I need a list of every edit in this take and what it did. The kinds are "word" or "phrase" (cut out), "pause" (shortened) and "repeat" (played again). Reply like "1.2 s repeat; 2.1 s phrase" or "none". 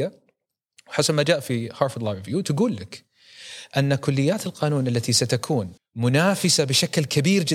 5.8 s pause